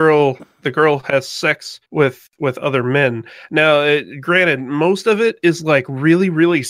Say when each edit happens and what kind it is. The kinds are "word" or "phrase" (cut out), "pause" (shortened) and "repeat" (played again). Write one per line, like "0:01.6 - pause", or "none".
0:01.8 - pause